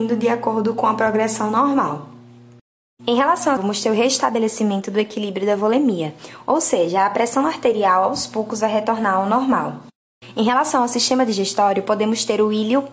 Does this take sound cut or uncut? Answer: cut